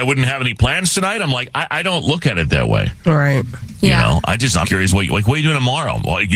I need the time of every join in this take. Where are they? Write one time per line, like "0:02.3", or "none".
0:04.6